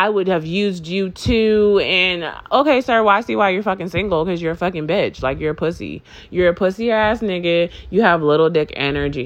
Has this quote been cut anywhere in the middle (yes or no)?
no